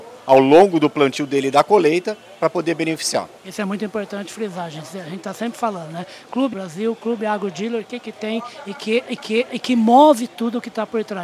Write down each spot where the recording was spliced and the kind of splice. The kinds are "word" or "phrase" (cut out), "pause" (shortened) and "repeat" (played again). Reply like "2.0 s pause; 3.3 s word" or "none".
3.4 s pause; 6.5 s word; 9.2 s repeat

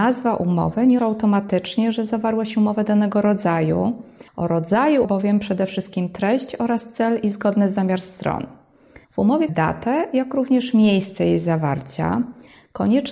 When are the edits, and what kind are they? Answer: 1.0 s word; 4.3 s pause; 5.0 s phrase; 9.0 s pause; 9.5 s word

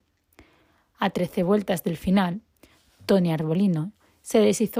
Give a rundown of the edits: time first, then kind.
none

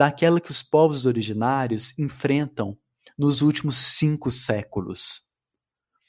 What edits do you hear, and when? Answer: none

